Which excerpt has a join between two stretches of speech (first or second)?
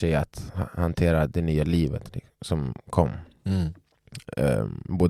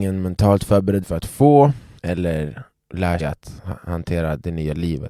second